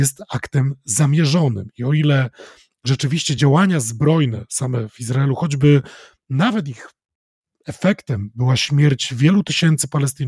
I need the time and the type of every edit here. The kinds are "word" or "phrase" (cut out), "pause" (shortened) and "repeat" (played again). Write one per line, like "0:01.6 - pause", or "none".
none